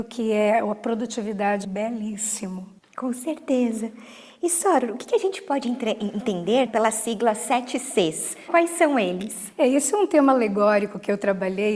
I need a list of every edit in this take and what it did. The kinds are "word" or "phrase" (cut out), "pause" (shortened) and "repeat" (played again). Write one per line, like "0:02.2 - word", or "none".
0:01.6 - phrase
0:02.8 - pause
0:06.7 - word
0:08.5 - phrase